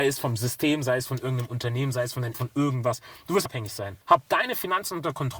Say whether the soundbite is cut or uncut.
cut